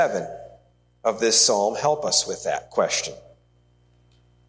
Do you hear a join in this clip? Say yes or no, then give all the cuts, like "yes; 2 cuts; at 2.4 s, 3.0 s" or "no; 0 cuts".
no; 0 cuts